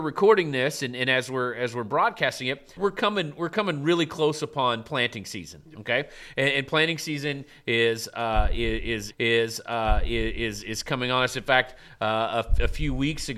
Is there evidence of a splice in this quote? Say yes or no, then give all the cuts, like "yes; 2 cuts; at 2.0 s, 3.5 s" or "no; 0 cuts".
yes; 2 cuts; at 2.8 s, 9.1 s